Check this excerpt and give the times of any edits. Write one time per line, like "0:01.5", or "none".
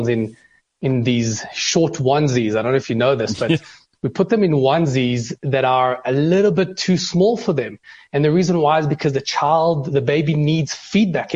none